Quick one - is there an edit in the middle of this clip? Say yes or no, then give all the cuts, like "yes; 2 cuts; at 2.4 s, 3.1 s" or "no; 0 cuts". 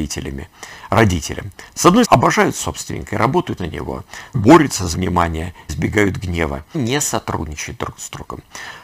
yes; 6 cuts; at 2.0 s, 3.6 s, 4.3 s, 4.9 s, 5.7 s, 6.7 s